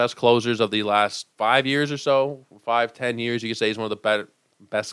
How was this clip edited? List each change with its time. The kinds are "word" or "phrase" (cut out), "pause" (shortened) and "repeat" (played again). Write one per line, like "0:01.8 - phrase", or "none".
0:01.3 - pause

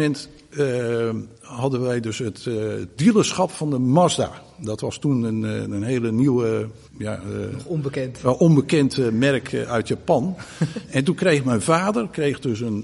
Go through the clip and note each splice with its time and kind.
0:06.9 - pause

